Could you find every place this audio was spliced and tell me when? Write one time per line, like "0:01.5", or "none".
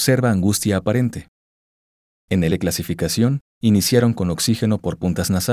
0:02.5